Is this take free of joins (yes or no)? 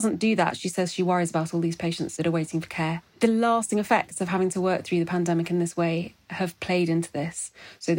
no